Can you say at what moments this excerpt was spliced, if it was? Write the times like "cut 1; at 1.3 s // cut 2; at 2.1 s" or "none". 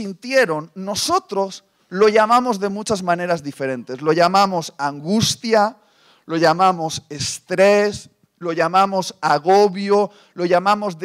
none